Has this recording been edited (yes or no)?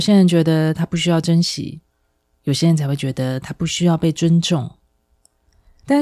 no